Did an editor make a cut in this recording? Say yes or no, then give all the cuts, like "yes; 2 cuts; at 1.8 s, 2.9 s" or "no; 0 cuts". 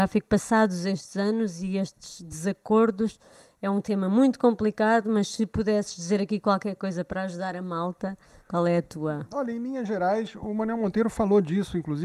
no; 0 cuts